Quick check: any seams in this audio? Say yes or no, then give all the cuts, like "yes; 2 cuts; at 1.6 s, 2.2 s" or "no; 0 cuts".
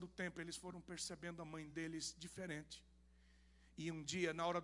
no; 0 cuts